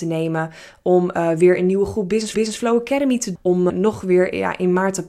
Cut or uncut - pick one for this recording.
cut